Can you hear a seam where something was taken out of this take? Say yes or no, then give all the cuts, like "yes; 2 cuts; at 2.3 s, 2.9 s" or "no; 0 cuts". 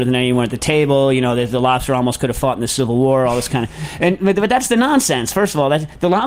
no; 0 cuts